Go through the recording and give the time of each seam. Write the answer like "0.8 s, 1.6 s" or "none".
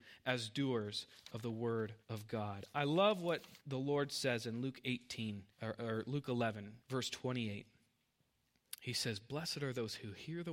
2.0 s, 3.6 s, 5.5 s, 6.8 s